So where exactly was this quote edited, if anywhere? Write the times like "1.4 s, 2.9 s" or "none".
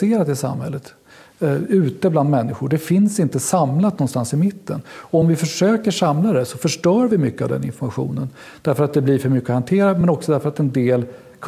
none

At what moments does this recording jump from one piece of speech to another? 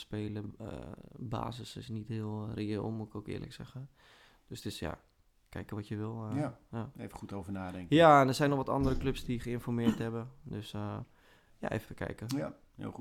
11.9 s

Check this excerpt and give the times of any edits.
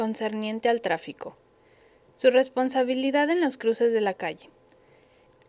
none

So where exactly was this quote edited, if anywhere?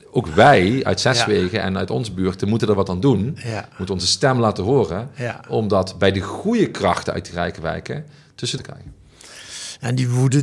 8.6 s

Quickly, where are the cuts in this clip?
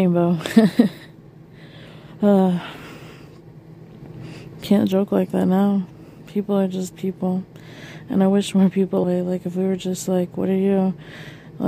9.0 s

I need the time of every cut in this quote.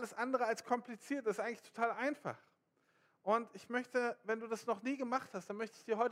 none

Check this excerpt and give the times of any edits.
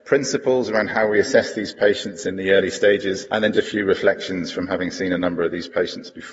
3.5 s

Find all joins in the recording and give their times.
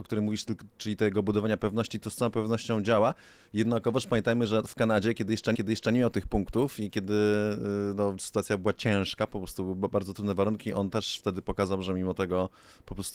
5.5 s

